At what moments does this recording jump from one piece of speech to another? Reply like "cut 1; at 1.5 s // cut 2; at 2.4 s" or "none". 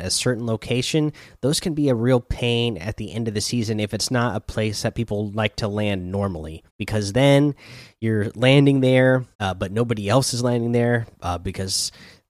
cut 1; at 6.7 s // cut 2; at 9.3 s // cut 3; at 11.1 s

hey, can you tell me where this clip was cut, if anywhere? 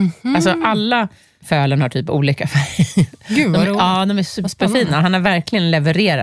none

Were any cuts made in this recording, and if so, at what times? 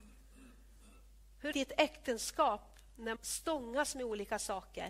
cut 1; at 1.5 s // cut 2; at 3.2 s

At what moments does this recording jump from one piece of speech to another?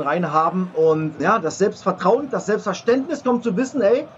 cut 1; at 1.2 s // cut 2; at 2.3 s

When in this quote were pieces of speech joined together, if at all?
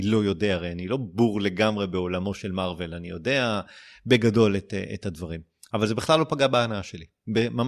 none

